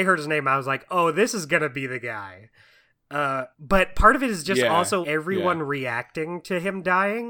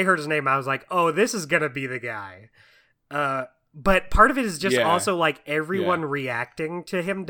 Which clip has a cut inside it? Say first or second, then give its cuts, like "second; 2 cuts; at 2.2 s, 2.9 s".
first; 2 cuts; at 3.5 s, 5.0 s